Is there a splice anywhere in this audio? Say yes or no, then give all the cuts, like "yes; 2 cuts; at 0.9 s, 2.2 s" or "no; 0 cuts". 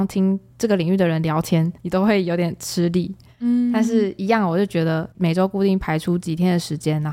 yes; 2 cuts; at 1.8 s, 5.1 s